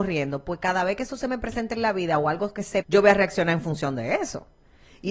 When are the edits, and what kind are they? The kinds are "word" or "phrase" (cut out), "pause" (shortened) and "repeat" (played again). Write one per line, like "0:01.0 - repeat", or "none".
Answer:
0:02.8 - phrase